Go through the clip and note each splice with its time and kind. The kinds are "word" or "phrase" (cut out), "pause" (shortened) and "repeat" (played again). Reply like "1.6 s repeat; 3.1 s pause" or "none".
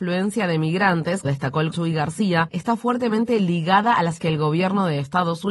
1.2 s word; 1.7 s word; 4.2 s word